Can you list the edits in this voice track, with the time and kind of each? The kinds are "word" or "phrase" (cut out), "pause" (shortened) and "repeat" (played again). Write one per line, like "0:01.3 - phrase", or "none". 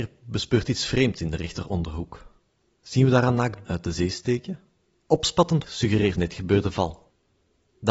0:03.7 - word
0:05.7 - word
0:06.2 - word